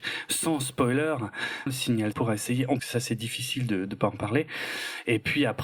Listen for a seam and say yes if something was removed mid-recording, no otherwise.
yes